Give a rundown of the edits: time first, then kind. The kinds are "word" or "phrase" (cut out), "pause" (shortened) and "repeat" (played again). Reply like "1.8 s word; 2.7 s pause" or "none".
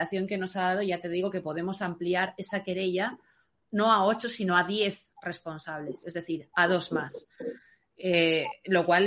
none